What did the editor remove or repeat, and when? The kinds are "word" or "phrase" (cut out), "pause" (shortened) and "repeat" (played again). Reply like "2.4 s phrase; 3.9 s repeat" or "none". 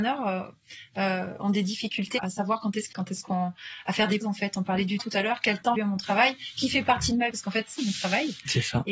2.2 s word; 2.9 s word; 4.2 s word; 5.0 s word; 5.8 s word; 7.3 s word; 7.8 s word